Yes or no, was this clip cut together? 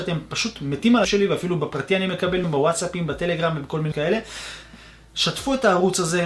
yes